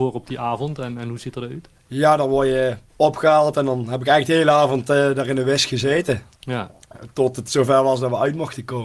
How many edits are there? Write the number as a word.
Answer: two